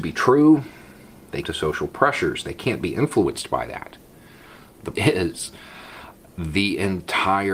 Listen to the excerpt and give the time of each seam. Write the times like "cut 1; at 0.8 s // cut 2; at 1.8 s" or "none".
cut 1; at 1.4 s // cut 2; at 4.9 s